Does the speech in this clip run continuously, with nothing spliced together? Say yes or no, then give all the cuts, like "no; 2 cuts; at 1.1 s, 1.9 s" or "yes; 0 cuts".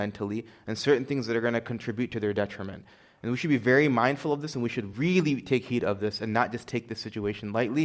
yes; 0 cuts